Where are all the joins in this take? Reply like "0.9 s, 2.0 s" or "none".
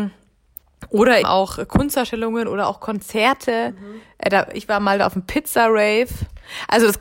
1.2 s